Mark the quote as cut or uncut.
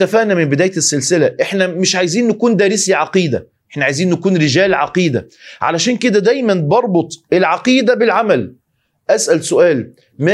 uncut